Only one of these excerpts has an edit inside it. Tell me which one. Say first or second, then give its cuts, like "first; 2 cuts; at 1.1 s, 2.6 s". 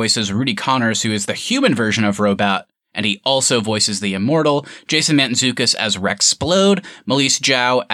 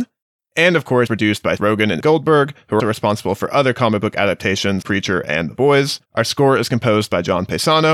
second; 6 cuts; at 1.1 s, 1.6 s, 2.0 s, 2.8 s, 4.8 s, 6.1 s